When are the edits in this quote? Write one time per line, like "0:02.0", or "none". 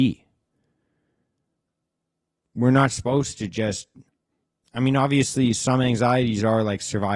0:04.1